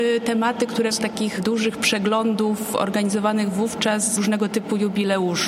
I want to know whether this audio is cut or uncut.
cut